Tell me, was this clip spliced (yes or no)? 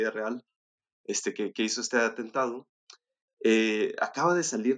no